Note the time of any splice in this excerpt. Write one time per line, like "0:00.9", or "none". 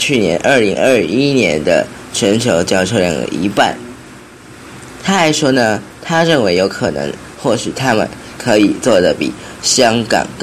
0:07.3